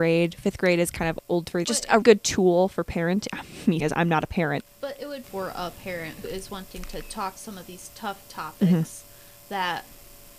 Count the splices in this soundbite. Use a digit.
7